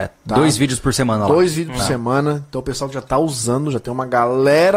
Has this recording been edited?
no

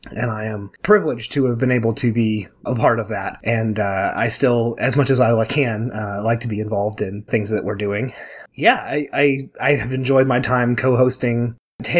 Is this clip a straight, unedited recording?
no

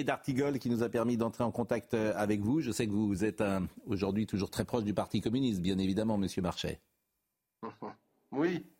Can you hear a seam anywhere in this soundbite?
no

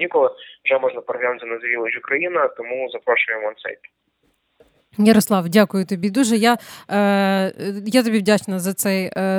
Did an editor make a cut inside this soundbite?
no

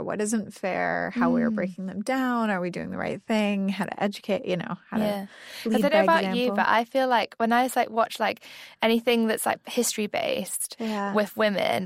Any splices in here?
no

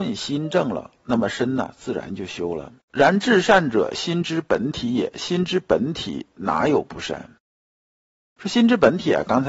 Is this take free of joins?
no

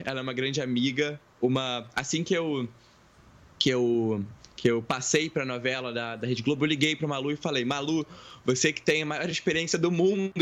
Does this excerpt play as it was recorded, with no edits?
yes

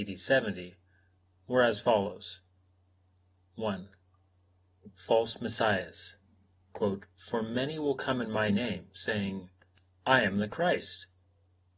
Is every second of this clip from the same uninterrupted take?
yes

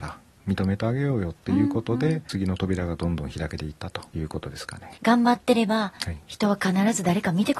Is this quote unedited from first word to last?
no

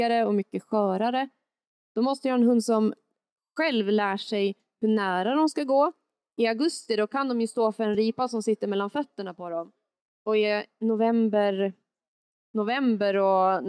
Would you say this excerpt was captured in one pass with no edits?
yes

